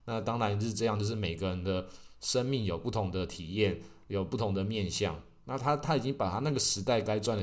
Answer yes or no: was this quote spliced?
no